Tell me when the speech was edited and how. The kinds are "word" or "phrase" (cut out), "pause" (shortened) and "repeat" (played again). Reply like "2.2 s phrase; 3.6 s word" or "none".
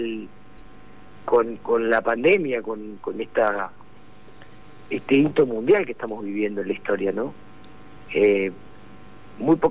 none